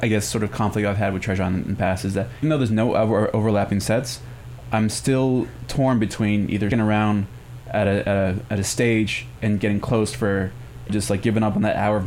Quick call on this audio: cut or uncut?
cut